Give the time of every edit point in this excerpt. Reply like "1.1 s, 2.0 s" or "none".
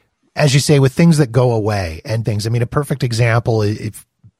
2.2 s